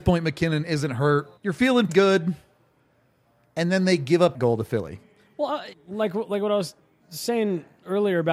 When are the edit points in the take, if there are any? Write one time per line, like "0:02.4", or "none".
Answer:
0:01.4
0:01.9
0:04.3
0:05.7